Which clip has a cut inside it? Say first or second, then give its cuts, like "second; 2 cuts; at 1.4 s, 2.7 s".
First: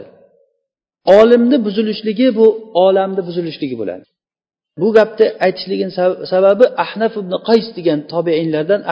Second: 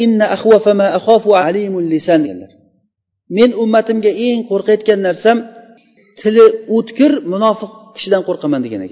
second; 2 cuts; at 1.4 s, 2.2 s